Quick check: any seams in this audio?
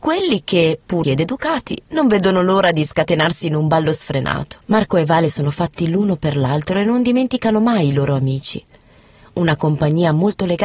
yes; 2 cuts; at 1.0 s, 4.6 s

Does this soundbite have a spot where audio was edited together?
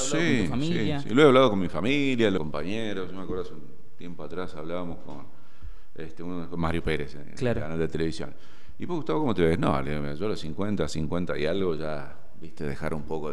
yes; 1 cut; at 2.4 s

